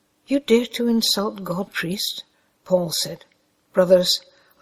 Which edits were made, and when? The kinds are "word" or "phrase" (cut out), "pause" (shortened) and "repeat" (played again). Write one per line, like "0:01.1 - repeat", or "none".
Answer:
0:01.7 - word
0:02.3 - pause